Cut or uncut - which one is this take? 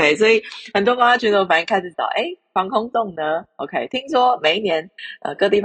uncut